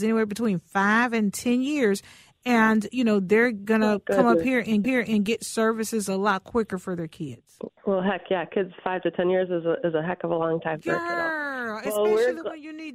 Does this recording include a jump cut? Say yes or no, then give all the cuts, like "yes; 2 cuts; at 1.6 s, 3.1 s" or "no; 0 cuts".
yes; 1 cut; at 4.8 s